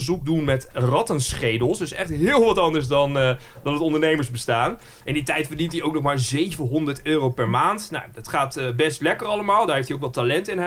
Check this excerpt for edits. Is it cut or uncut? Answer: uncut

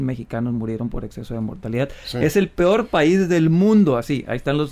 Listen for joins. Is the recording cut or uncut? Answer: uncut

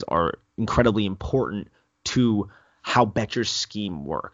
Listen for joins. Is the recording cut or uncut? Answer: uncut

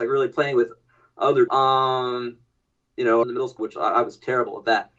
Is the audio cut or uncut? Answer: cut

